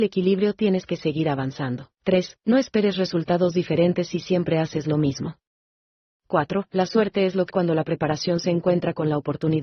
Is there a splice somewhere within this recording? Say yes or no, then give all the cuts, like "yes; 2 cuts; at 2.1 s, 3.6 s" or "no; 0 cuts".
yes; 2 cuts; at 1.9 s, 7.5 s